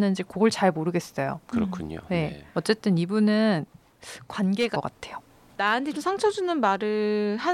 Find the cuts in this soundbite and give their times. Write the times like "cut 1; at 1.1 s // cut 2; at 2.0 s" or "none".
cut 1; at 2.5 s // cut 2; at 4.7 s // cut 3; at 5.9 s